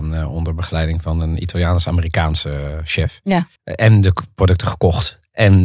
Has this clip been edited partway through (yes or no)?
yes